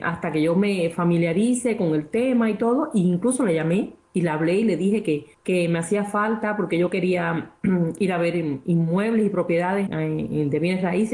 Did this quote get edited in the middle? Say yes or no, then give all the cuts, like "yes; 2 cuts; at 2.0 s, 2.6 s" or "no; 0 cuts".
yes; 2 cuts; at 5.3 s, 9.9 s